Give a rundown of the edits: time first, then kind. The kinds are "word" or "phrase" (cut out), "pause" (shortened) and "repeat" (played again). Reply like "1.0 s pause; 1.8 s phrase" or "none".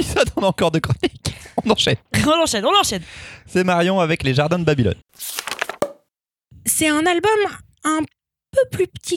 none

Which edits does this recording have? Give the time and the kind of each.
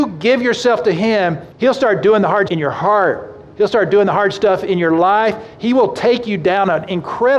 1.5 s pause; 2.5 s word

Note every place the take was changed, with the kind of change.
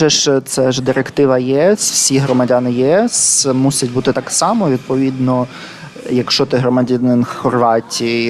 4.1 s word

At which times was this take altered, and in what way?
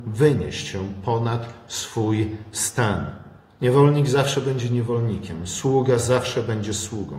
none

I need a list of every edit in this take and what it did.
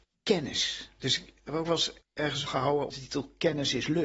2.0 s pause; 2.5 s word; 2.9 s word

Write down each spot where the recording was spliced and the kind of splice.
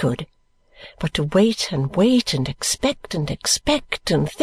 none

